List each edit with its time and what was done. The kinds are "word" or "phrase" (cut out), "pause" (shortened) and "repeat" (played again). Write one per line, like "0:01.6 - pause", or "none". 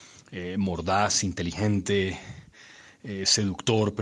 none